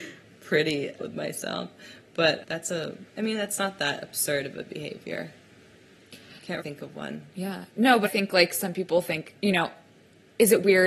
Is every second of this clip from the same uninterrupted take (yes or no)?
no